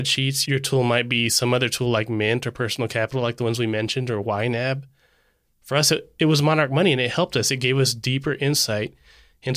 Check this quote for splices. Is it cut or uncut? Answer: uncut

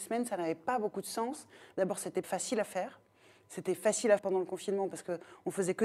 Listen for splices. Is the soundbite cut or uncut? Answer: cut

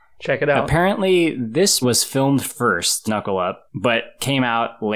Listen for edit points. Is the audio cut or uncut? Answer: cut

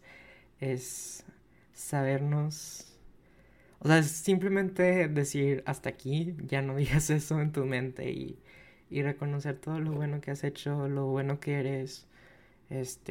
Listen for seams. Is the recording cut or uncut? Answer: uncut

